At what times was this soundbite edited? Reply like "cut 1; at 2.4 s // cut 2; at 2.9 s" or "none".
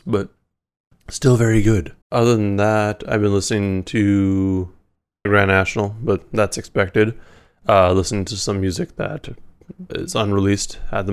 cut 1; at 2.0 s // cut 2; at 5.3 s // cut 3; at 9.9 s